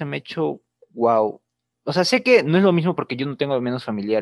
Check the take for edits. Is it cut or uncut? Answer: uncut